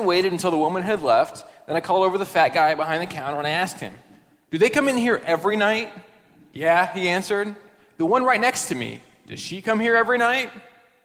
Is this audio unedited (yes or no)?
yes